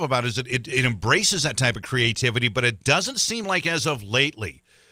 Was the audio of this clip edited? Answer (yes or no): no